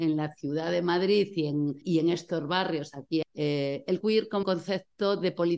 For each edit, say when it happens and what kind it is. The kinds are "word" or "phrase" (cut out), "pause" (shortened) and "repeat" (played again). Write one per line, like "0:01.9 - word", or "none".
0:01.8 - word
0:03.2 - word
0:04.0 - word
0:04.4 - word